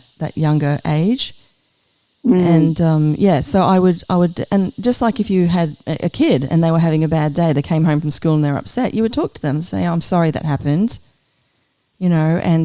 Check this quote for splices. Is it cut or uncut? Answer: cut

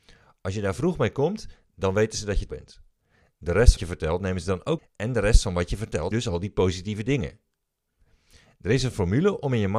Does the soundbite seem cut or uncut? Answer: cut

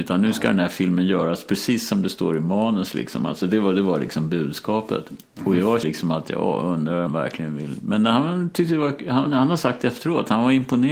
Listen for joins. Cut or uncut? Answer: cut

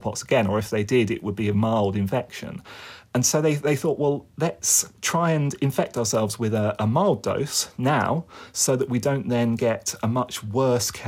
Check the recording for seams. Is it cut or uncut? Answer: cut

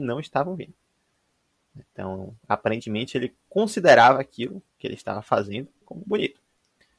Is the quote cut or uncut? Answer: cut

